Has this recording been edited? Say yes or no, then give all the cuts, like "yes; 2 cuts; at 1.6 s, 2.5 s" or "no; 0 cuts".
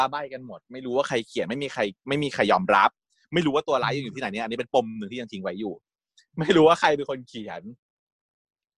no; 0 cuts